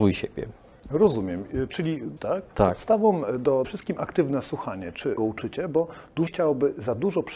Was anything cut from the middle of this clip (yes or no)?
yes